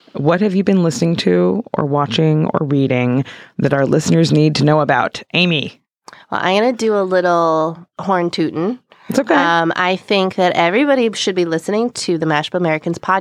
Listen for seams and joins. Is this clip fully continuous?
yes; 0 cuts

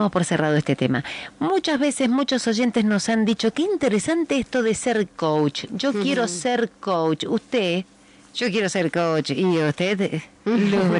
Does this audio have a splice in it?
no; 0 cuts

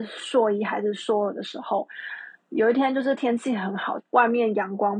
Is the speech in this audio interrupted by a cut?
no; 0 cuts

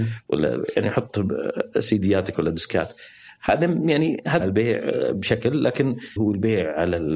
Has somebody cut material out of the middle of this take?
yes; 3 cuts; at 2.3 s, 4.4 s, 6.2 s

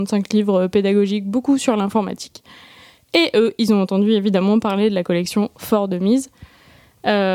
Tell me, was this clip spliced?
no; 0 cuts

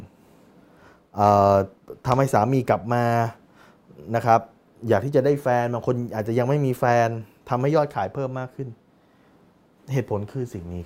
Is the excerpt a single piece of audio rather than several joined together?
yes; 0 cuts

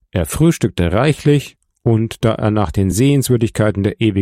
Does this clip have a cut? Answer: no; 0 cuts

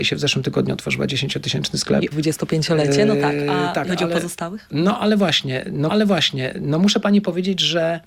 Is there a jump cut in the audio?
yes; 3 cuts; at 2.1 s, 3.9 s, 5.9 s

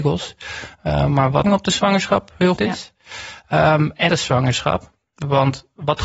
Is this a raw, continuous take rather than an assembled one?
no; 3 cuts; at 1.4 s, 2.6 s, 4.1 s

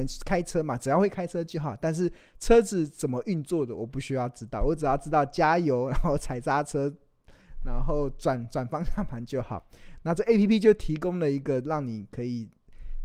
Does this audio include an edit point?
no; 0 cuts

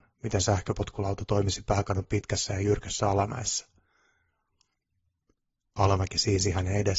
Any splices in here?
no; 0 cuts

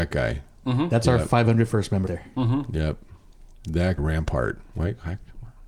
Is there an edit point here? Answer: yes; 2 cuts; at 2.1 s, 4.0 s

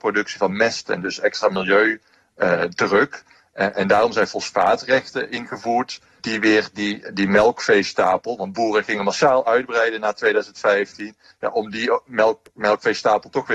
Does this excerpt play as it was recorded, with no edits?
yes; 0 cuts

